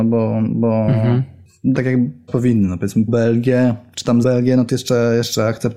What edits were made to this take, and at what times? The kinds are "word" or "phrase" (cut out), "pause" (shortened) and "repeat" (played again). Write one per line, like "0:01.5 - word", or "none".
0:01.7 - word
0:02.3 - word
0:03.1 - word
0:04.2 - word
0:04.7 - word